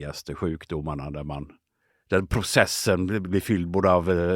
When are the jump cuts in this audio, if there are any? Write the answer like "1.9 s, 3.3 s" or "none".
none